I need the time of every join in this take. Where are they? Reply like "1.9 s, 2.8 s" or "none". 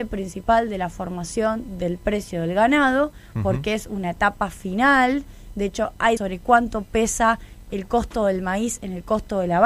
6.2 s